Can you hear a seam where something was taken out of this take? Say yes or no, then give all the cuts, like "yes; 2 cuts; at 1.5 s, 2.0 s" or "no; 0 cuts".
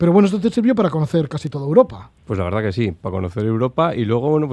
yes; 1 cut; at 2.2 s